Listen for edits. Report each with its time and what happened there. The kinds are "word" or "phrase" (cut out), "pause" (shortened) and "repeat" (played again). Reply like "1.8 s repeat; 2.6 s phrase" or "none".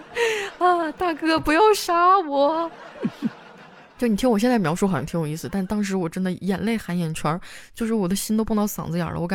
3.9 s pause